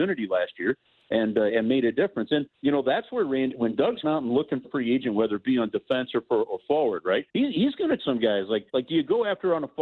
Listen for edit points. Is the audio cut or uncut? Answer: cut